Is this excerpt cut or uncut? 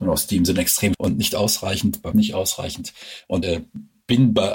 cut